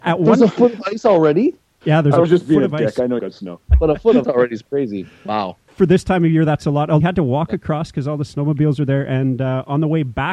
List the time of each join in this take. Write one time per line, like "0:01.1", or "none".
0:03.2
0:04.2
0:04.6
0:07.0